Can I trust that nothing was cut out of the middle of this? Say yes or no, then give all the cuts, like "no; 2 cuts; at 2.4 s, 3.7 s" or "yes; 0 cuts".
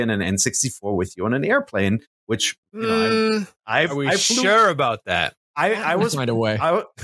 no; 1 cut; at 2.7 s